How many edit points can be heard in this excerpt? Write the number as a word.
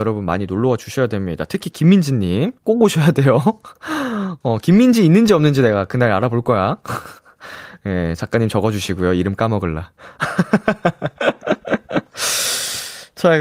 three